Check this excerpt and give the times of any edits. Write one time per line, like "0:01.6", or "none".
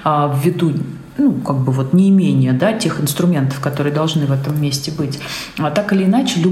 none